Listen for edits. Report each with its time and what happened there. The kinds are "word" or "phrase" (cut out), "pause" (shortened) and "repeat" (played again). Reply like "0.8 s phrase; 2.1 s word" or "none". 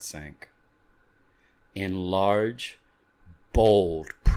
none